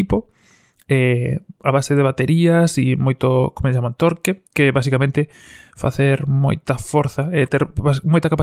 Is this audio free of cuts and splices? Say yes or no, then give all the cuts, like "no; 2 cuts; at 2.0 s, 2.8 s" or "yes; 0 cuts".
no; 1 cut; at 4.5 s